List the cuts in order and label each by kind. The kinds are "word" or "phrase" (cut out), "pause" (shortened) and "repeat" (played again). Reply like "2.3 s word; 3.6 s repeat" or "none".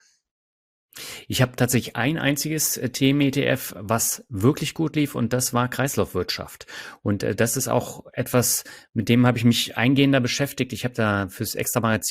none